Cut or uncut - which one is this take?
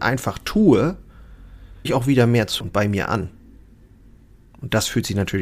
cut